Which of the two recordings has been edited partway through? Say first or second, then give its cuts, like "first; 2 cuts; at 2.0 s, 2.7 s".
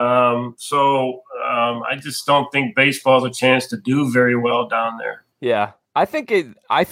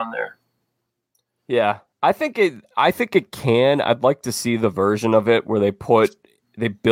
first; 1 cut; at 5.3 s